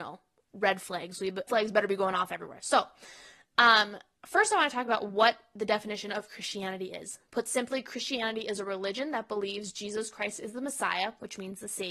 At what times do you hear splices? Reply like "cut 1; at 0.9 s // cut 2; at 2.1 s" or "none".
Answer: cut 1; at 1.5 s // cut 2; at 4.2 s // cut 3; at 7.3 s

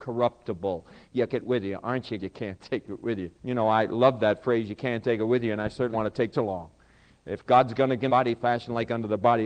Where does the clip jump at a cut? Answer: cut 1; at 1.3 s // cut 2; at 2.2 s // cut 3; at 3.4 s // cut 4; at 5.9 s // cut 5; at 6.3 s // cut 6; at 8.1 s

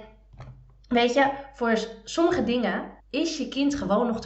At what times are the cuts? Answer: cut 1; at 3.0 s

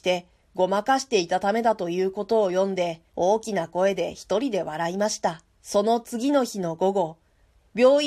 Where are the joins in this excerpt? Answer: cut 1; at 3.1 s // cut 2; at 5.5 s

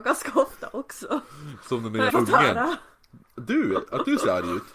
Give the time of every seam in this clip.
cut 1; at 2.1 s // cut 2; at 3.2 s

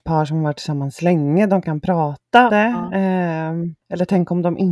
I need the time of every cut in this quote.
cut 1; at 1.6 s // cut 2; at 2.5 s

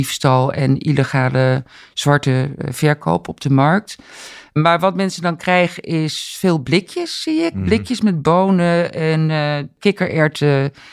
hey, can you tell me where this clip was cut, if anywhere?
none

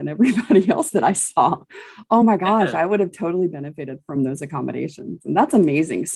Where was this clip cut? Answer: none

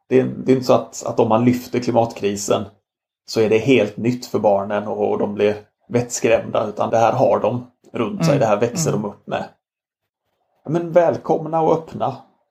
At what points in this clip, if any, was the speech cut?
cut 1; at 6.9 s

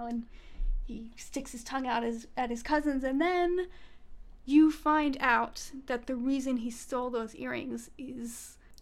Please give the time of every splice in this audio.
none

